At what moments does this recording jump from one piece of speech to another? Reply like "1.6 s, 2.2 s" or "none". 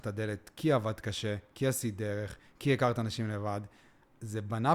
none